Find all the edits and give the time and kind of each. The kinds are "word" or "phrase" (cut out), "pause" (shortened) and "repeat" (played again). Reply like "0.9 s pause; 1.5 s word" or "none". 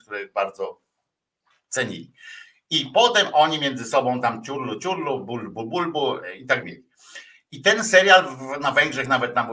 6.6 s word

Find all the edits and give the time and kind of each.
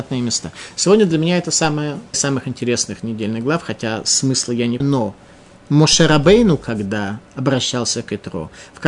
2.1 s phrase; 4.8 s word; 7.3 s pause

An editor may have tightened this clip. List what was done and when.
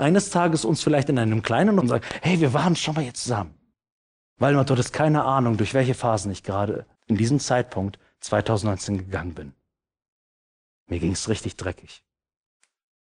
1.8 s phrase; 3.7 s pause; 6.9 s pause

